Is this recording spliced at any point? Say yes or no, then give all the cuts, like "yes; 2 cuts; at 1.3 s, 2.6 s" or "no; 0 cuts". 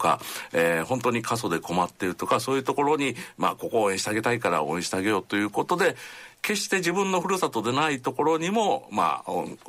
yes; 1 cut; at 6.4 s